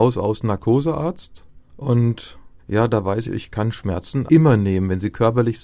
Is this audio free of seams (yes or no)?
no